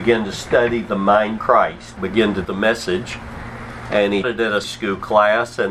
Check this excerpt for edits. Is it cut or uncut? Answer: cut